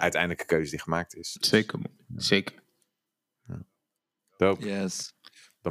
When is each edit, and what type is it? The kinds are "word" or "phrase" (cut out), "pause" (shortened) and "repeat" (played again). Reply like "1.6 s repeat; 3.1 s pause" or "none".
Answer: none